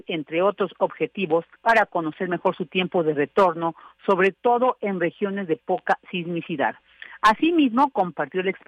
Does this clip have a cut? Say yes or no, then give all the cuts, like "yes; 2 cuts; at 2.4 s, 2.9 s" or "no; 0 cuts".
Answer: yes; 1 cut; at 1.5 s